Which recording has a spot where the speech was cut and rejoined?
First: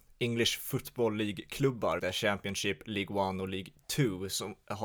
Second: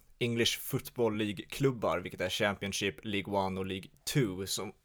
first; 1 cut; at 2.0 s

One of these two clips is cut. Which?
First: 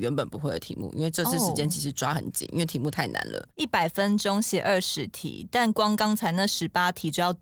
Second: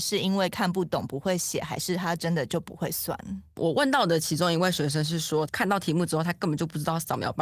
first; 1 cut; at 3.5 s

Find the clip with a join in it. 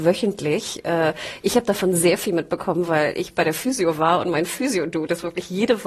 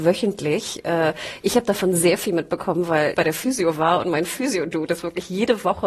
second; 1 cut; at 3.1 s

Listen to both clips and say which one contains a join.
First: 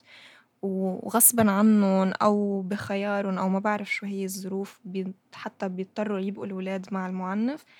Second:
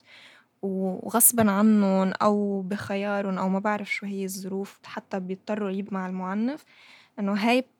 second; 2 cuts; at 4.8 s, 5.9 s

